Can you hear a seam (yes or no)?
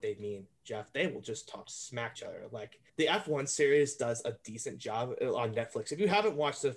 yes